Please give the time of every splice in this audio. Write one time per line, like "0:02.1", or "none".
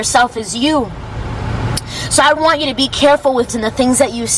0:02.4
0:03.5